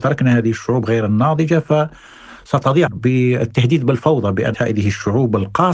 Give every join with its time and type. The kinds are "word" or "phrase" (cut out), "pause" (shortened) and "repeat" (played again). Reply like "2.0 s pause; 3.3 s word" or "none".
2.9 s word; 4.5 s word